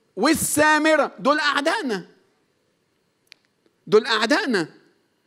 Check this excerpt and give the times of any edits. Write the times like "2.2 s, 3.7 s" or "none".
none